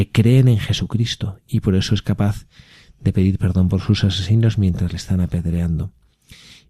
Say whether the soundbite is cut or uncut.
uncut